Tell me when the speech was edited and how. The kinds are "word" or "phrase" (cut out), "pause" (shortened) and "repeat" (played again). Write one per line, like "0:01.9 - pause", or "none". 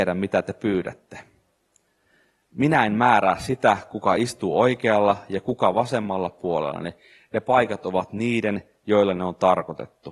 none